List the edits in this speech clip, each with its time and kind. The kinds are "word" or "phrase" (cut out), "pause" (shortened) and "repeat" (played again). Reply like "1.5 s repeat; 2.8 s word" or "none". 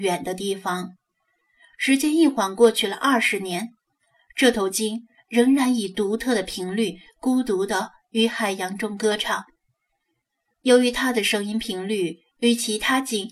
none

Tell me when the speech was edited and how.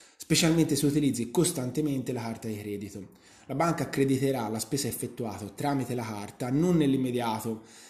none

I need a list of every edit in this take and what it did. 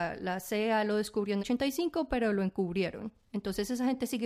1.4 s word

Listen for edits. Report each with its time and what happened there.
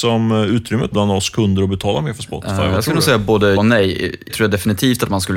0.9 s word; 3.6 s word; 4.3 s word

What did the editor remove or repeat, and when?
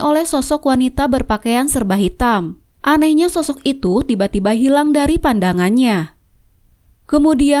2.7 s pause

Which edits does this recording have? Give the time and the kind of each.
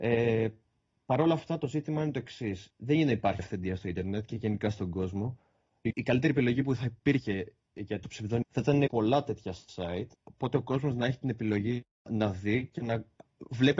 2.7 s pause; 3.4 s word; 5.9 s word; 8.0 s word; 8.4 s word; 8.9 s word; 10.1 s pause; 12.1 s word

